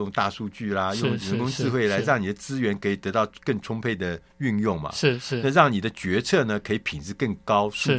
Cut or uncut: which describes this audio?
uncut